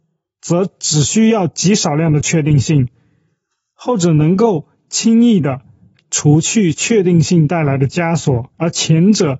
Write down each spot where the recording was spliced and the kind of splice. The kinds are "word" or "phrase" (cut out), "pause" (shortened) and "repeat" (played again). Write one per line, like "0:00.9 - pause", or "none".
0:08.5 - pause